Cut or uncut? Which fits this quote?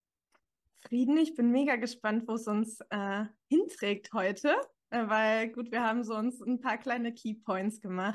uncut